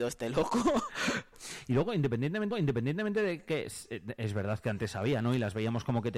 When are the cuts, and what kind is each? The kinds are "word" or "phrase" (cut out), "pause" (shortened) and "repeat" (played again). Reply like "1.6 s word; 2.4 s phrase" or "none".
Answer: 2.5 s repeat